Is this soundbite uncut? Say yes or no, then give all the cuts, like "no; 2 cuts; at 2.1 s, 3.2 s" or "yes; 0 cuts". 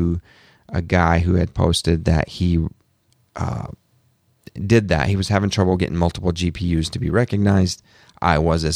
yes; 0 cuts